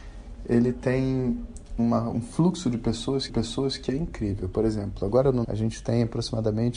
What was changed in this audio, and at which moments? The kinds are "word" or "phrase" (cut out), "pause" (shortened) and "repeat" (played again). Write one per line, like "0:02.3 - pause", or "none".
0:01.8 - word
0:03.3 - repeat
0:05.4 - word